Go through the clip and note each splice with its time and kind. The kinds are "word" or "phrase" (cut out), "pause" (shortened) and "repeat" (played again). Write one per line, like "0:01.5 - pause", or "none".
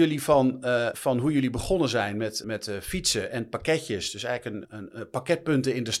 0:00.9 - word
0:02.4 - word
0:04.6 - word

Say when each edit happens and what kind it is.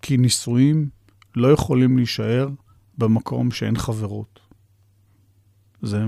none

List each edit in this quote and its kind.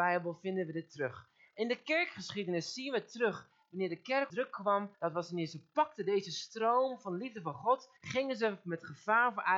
0:04.3 - word
0:04.9 - pause
0:08.0 - pause

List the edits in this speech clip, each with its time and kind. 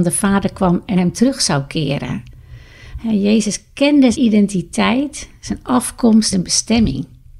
0:00.9 - word
0:04.1 - word
0:06.3 - word

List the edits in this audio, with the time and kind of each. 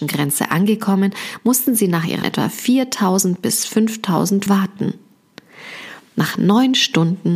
0:02.2 - phrase
0:04.5 - phrase

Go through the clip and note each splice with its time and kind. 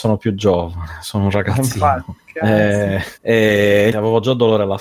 0:03.2 - pause
0:03.9 - word

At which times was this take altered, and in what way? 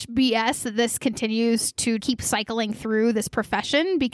0:02.0 - word

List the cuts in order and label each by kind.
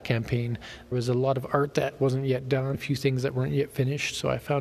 0:00.9 - word
0:02.7 - word

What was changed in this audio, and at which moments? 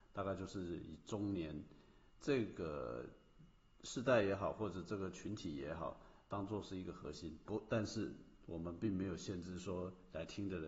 none

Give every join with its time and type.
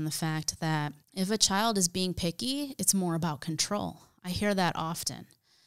0:01.0 - pause

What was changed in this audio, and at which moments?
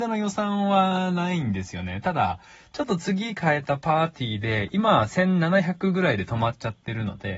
none

